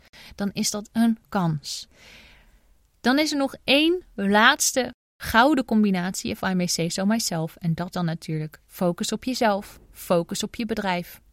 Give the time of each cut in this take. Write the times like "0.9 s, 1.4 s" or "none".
0.9 s, 1.2 s, 7.9 s, 8.7 s, 9.8 s